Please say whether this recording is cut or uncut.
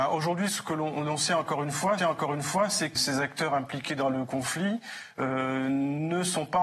cut